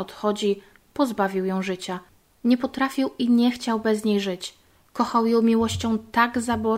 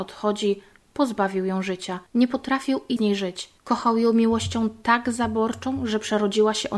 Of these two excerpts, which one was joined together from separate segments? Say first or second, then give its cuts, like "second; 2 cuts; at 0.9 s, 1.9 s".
second; 3 cuts; at 2.1 s, 3.0 s, 3.6 s